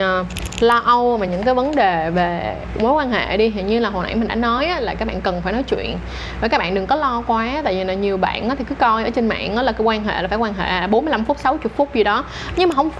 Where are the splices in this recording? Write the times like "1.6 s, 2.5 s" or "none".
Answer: none